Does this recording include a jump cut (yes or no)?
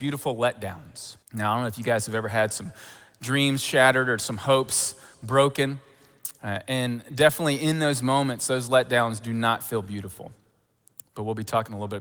yes